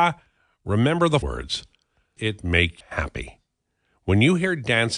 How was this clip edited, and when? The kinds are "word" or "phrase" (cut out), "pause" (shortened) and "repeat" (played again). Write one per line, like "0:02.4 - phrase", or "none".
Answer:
0:01.2 - word
0:02.2 - word
0:02.8 - word